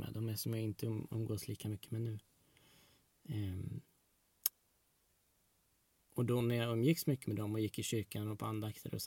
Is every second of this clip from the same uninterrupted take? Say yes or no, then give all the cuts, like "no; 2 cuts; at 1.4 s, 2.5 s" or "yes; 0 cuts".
yes; 0 cuts